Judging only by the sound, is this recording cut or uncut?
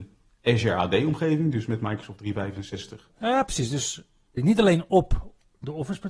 uncut